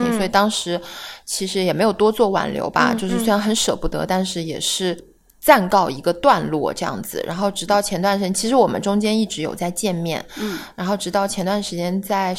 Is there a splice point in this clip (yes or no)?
no